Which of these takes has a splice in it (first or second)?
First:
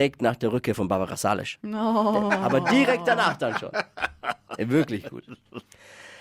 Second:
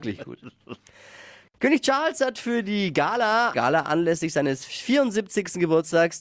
second